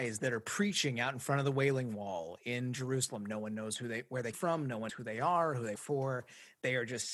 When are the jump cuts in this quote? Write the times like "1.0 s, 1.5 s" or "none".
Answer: 4.3 s, 4.9 s, 5.8 s